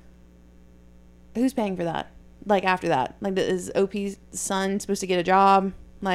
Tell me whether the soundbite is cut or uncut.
cut